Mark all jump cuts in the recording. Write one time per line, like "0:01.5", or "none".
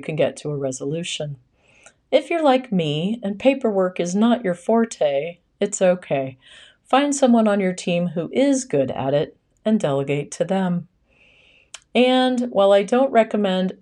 none